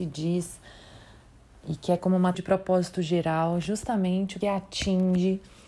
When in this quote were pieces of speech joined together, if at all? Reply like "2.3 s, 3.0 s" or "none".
2.0 s, 2.3 s, 4.4 s